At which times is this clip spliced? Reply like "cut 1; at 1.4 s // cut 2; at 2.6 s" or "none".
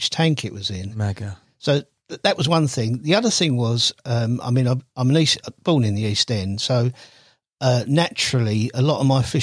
none